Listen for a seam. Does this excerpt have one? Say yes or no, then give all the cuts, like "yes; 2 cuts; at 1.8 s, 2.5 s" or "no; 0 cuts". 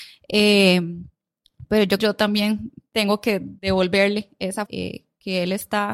yes; 4 cuts; at 2.0 s, 2.9 s, 3.6 s, 4.7 s